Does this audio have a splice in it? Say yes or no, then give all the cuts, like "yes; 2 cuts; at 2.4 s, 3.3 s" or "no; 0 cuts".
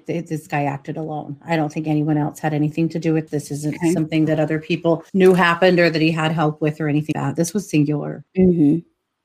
yes; 4 cuts; at 3.3 s, 5.1 s, 7.1 s, 8.3 s